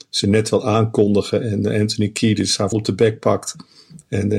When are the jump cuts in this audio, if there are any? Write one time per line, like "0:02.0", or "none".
0:02.7